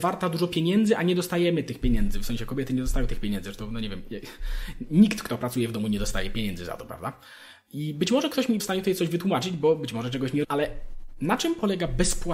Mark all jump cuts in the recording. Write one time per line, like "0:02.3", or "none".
0:08.6
0:10.4